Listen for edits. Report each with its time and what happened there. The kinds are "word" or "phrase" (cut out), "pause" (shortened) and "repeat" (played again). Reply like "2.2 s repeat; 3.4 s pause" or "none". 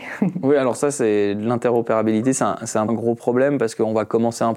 2.9 s word